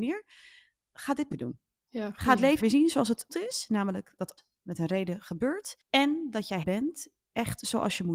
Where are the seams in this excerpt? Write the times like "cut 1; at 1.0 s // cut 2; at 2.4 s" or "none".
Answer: cut 1; at 1.3 s // cut 2; at 2.6 s // cut 3; at 3.3 s // cut 4; at 4.4 s // cut 5; at 5.8 s // cut 6; at 6.6 s

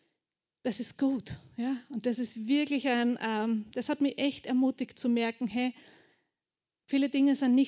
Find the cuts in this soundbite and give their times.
none

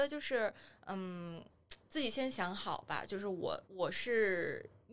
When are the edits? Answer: cut 1; at 3.6 s

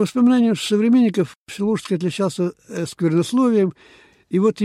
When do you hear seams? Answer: none

